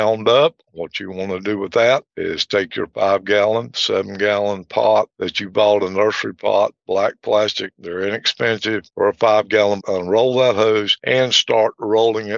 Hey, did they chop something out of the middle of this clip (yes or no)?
yes